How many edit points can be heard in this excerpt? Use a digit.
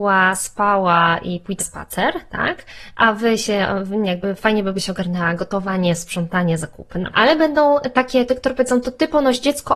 4